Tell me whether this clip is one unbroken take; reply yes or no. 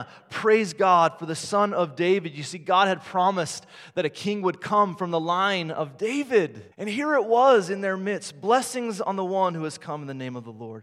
no